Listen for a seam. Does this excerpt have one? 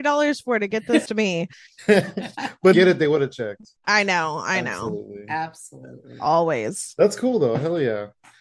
yes; 4 cuts; at 1.1 s, 1.5 s, 2.7 s, 3.8 s

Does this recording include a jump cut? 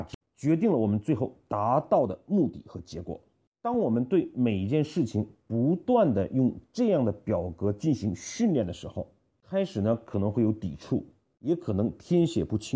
no; 0 cuts

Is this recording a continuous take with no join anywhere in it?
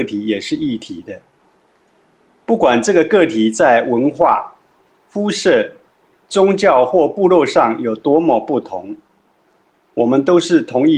no; 1 cut; at 6.2 s

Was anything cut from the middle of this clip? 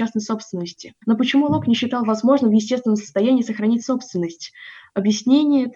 yes; 1 cut; at 1.0 s

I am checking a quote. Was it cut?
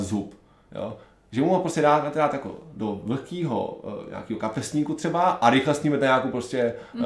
no; 0 cuts

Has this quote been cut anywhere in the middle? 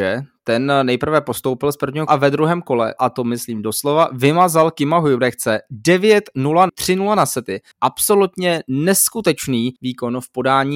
yes; 5 cuts; at 2.1 s, 3.0 s, 6.7 s, 7.7 s, 9.8 s

